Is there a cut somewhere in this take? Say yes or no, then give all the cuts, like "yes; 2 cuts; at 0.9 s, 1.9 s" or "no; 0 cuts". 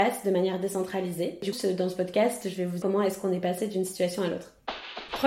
yes; 2 cuts; at 1.5 s, 2.8 s